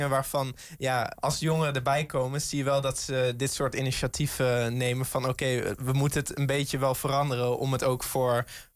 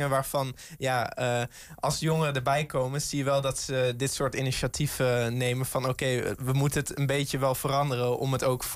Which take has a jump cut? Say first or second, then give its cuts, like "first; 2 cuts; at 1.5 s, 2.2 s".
first; 1 cut; at 1.2 s